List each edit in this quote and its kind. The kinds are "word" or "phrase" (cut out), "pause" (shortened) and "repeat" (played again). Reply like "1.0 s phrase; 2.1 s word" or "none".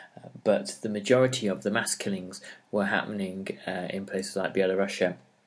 none